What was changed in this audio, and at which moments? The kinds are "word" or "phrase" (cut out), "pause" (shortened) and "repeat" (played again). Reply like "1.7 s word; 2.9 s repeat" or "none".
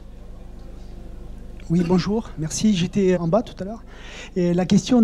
3.1 s word